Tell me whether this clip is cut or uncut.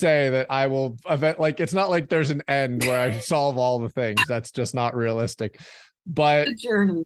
uncut